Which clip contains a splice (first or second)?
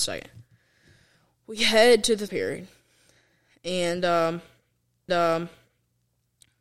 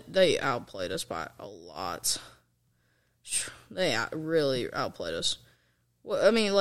first